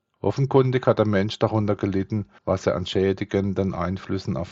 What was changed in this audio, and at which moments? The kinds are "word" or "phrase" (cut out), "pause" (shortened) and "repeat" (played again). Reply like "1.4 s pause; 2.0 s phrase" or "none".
2.4 s pause

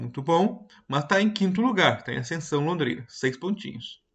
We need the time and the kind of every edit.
none

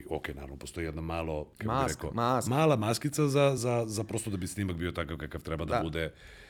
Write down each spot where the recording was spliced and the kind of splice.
1.5 s pause; 3.6 s word

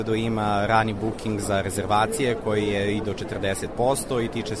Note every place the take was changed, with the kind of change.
none

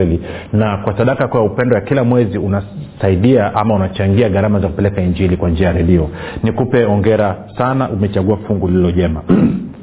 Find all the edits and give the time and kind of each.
none

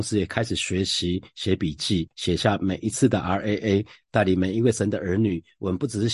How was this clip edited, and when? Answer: none

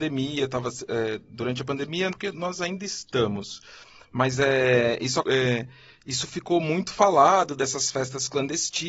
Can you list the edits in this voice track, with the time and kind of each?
2.1 s word; 5.2 s word

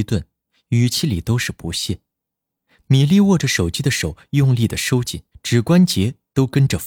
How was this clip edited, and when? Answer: 5.3 s pause

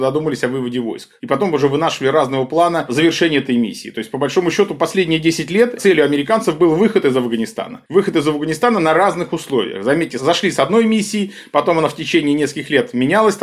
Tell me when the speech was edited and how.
7.9 s pause

